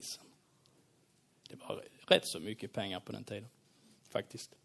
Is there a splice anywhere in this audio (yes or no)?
no